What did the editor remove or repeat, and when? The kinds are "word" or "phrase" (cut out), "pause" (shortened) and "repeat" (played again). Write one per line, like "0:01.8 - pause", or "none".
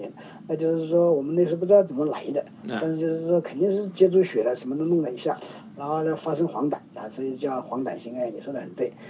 0:06.8 - pause